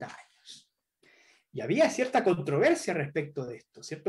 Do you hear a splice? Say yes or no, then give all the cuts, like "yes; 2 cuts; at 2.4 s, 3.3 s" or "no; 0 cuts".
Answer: no; 0 cuts